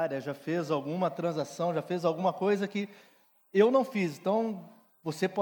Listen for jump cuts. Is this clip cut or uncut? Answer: uncut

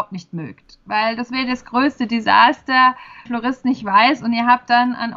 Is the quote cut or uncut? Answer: cut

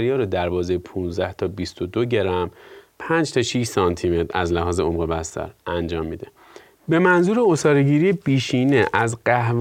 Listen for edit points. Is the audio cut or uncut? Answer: uncut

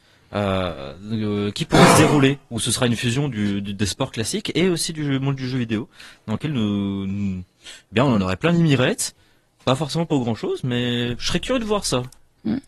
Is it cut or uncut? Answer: uncut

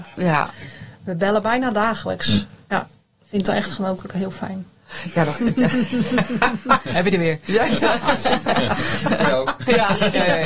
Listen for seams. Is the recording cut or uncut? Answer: uncut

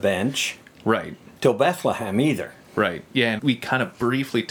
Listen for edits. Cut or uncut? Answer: cut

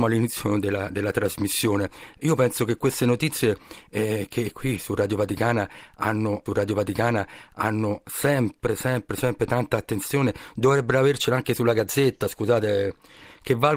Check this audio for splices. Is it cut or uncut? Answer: cut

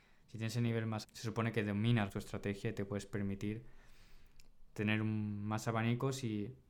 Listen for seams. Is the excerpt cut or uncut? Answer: cut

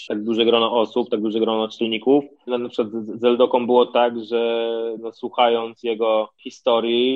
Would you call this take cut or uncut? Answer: uncut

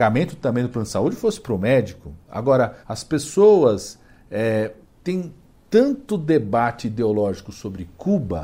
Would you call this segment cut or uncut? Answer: cut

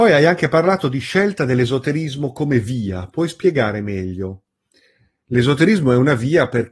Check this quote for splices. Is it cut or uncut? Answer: uncut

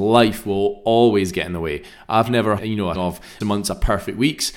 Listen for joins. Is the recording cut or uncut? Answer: cut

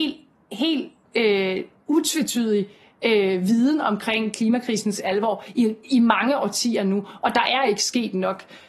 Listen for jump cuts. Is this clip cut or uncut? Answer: uncut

